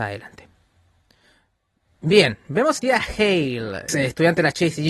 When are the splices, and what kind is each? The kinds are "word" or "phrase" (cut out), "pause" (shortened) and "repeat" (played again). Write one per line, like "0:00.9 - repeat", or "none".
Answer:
0:02.8 - word
0:03.9 - phrase